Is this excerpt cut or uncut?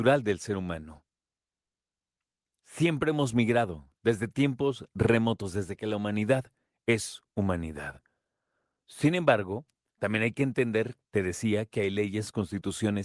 uncut